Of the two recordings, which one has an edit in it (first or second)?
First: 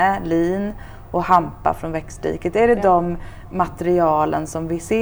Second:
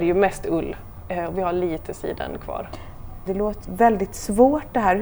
second